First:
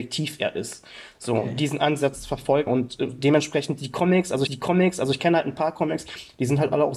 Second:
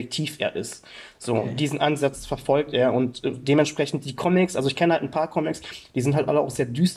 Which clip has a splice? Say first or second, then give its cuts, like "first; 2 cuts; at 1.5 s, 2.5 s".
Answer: first; 2 cuts; at 2.7 s, 4.5 s